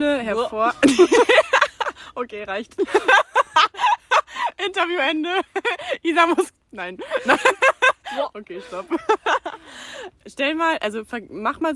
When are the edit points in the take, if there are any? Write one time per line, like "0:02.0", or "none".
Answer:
0:06.6